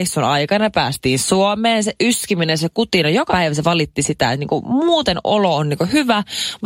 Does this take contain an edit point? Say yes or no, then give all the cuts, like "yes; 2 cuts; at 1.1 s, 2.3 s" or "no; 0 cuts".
yes; 1 cut; at 3.3 s